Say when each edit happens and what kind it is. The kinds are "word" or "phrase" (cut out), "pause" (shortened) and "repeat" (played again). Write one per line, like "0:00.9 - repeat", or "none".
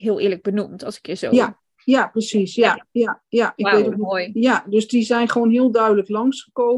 none

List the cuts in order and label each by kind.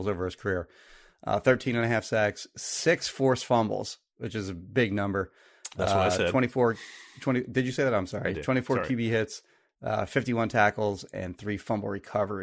none

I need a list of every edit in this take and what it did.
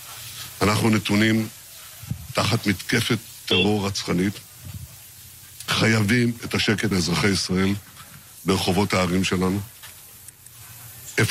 0:06.4 - word
0:06.9 - word

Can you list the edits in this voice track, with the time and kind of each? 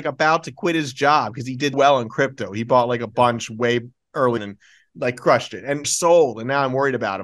0:01.7 - word
0:04.4 - word
0:05.8 - phrase

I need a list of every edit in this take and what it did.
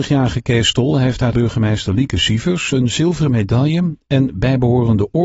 0:01.3 - phrase

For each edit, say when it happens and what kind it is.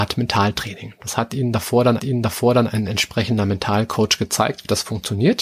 0:02.0 - repeat

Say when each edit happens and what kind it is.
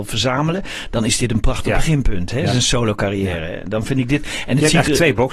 none

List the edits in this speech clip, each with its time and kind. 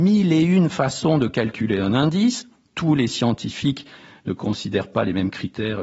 none

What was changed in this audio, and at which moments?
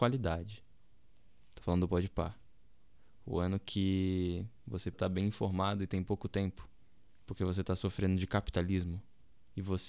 0:04.9 - word

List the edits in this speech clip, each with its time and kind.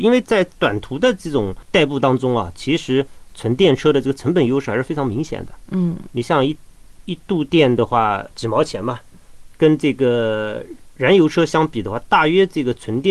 0:08.3 - pause

